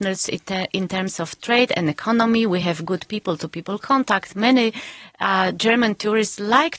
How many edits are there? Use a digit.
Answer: 0